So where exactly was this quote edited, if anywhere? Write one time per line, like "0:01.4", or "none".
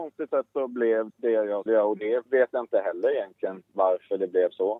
0:01.1
0:01.7
0:02.3